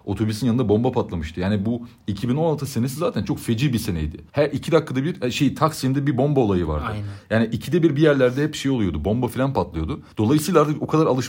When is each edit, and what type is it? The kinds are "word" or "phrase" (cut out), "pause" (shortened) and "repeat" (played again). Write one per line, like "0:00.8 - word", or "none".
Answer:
0:04.3 - pause
0:10.1 - pause